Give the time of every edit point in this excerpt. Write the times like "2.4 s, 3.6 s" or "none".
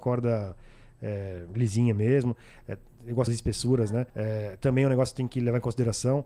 3.3 s, 4.1 s